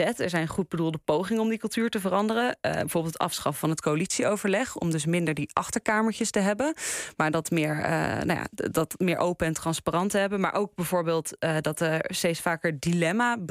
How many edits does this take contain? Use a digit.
0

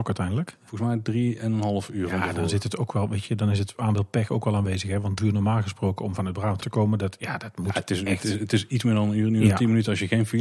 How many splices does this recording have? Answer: 2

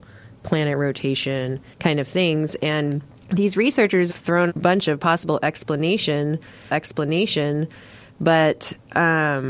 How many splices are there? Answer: 5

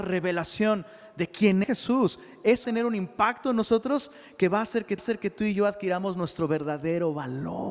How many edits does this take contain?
3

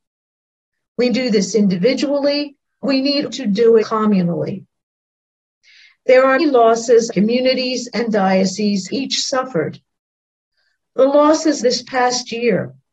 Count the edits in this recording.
8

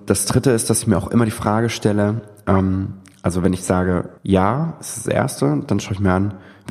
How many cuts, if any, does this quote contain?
1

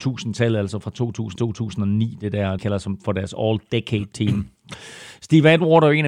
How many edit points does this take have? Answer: 2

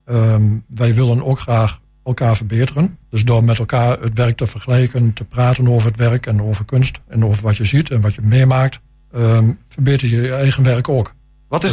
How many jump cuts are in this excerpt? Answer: 2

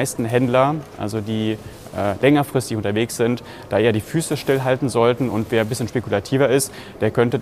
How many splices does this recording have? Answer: 0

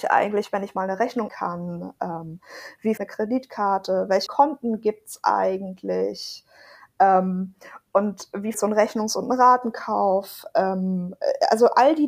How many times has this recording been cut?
4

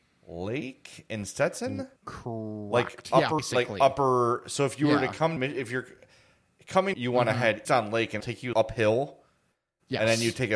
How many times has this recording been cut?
7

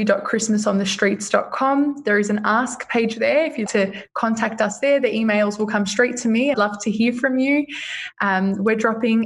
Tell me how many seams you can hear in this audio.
2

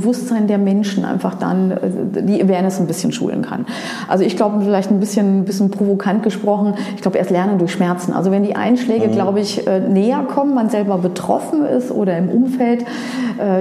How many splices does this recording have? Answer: 0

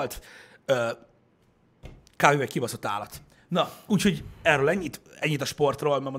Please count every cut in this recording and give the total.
0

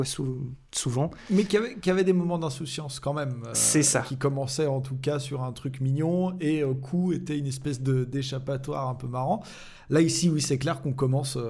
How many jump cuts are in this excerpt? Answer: 0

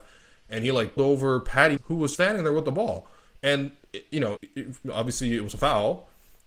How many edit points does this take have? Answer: 4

